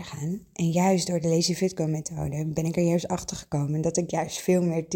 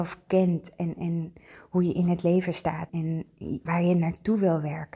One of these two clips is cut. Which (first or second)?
second